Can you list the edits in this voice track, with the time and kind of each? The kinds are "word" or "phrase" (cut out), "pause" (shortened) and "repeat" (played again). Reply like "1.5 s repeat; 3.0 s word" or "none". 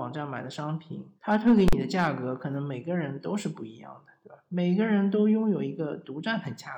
1.2 s pause